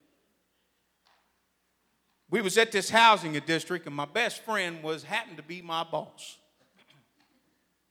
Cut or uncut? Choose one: uncut